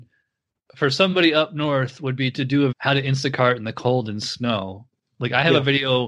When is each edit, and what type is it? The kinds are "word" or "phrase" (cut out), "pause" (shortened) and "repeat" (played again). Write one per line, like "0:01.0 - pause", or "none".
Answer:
0:02.7 - word